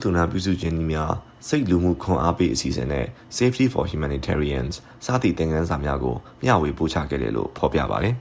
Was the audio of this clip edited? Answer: no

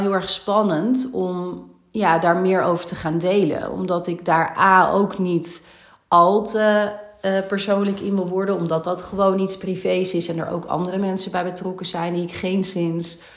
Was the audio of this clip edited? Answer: no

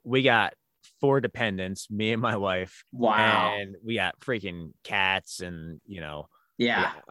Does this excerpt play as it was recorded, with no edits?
no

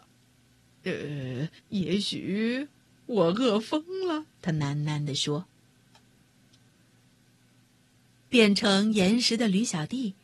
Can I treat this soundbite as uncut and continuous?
no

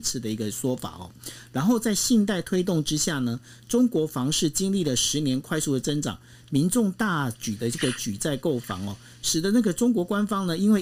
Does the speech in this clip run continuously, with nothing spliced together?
yes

